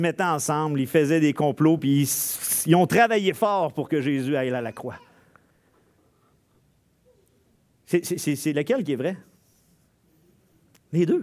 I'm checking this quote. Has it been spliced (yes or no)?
no